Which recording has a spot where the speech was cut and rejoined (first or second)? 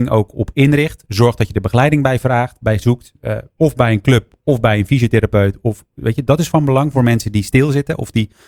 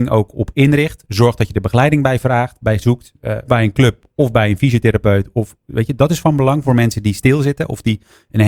second